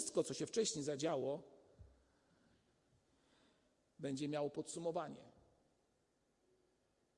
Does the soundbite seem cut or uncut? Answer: uncut